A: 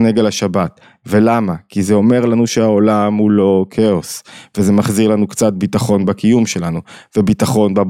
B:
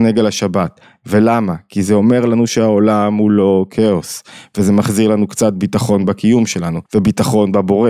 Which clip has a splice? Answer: B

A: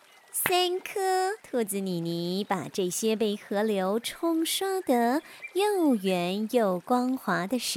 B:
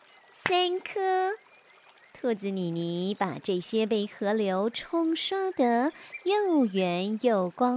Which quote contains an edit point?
A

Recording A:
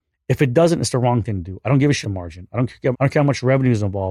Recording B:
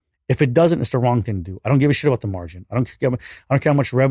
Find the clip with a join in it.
A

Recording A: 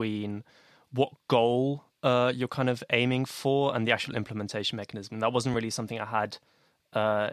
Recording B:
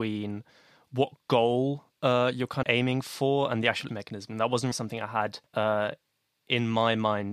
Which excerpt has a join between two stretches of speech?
B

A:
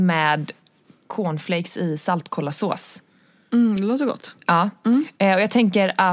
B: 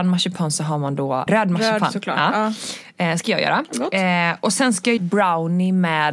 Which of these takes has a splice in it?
B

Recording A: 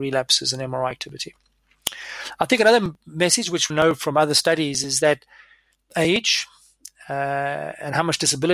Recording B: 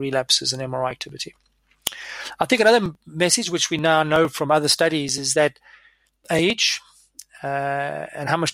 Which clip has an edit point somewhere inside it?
A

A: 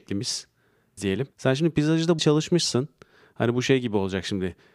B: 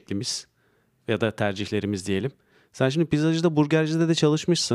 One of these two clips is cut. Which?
A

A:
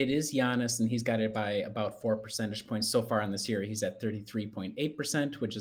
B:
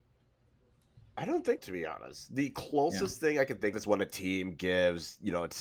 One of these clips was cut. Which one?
B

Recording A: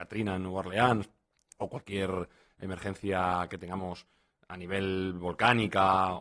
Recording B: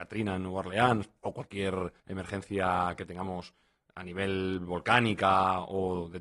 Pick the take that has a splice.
B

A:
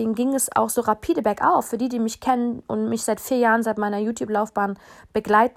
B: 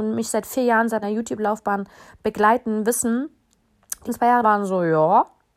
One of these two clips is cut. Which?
B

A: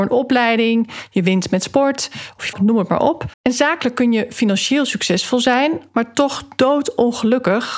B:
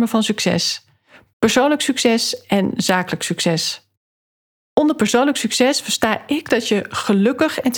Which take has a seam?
A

